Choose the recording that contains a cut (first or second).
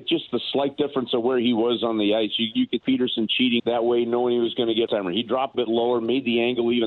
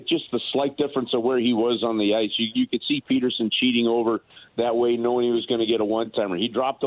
first